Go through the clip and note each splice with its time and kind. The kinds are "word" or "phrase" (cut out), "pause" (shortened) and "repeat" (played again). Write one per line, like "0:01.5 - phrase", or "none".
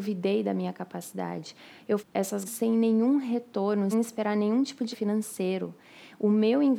0:02.0 - word
0:02.4 - word
0:03.9 - word
0:04.9 - word